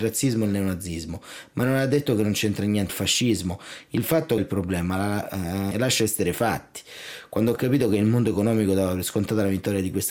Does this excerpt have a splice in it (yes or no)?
yes